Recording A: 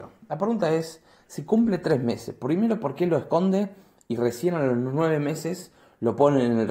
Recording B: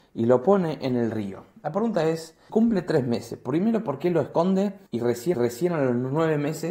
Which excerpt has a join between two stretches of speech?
B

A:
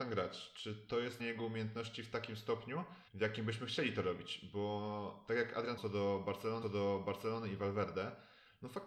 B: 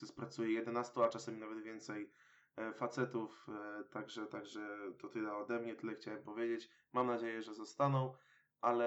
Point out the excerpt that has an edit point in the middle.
A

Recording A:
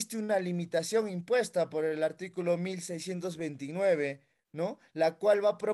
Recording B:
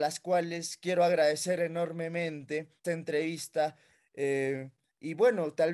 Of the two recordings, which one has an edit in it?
B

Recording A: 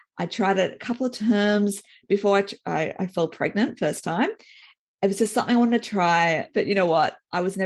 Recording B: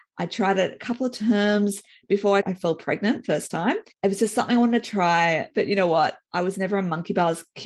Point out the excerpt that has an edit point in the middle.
B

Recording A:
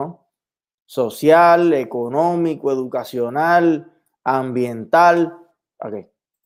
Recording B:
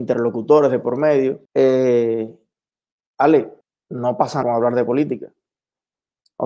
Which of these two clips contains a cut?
B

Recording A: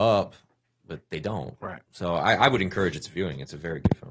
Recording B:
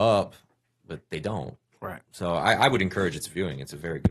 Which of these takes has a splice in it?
A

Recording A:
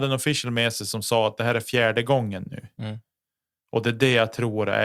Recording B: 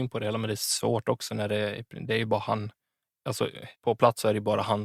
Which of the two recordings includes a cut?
B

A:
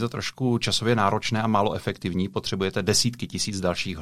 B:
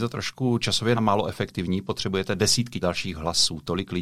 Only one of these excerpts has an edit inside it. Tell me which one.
B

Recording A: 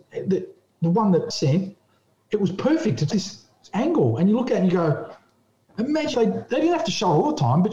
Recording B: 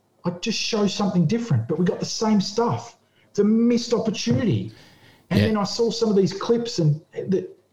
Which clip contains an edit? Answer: A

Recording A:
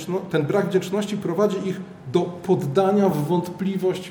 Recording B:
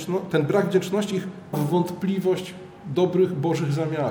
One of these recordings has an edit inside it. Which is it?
B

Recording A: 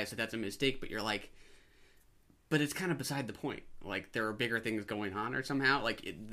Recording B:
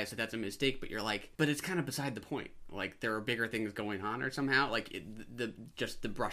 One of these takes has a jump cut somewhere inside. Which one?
B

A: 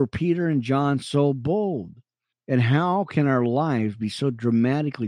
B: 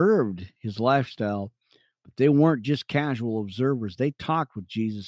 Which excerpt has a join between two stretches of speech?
A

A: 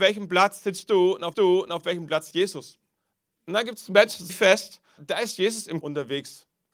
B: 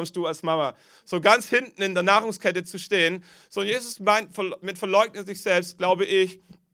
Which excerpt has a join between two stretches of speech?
A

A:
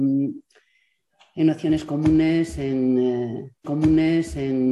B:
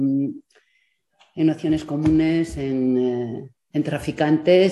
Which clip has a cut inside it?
A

